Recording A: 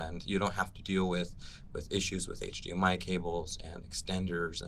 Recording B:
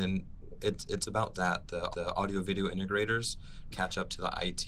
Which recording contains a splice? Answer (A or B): B